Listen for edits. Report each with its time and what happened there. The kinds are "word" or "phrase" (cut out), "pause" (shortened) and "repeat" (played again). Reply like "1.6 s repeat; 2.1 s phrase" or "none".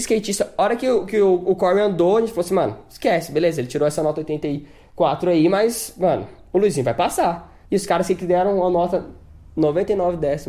7.6 s pause